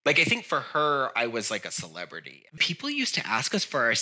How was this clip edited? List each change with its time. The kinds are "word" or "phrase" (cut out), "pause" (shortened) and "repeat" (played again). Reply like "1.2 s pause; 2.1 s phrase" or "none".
2.5 s pause